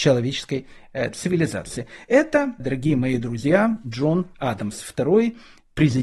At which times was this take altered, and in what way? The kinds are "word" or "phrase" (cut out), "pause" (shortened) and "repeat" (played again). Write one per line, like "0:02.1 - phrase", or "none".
0:02.6 - phrase